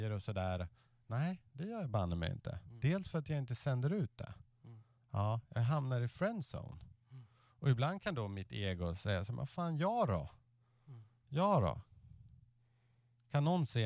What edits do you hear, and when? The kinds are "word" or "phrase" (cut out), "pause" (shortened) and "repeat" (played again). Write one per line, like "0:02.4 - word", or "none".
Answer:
0:01.5 - pause